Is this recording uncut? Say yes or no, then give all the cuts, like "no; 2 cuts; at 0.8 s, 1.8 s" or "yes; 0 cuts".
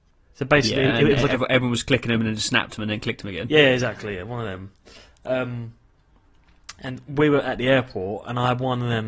yes; 0 cuts